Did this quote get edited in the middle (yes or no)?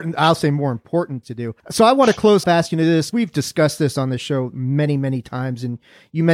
yes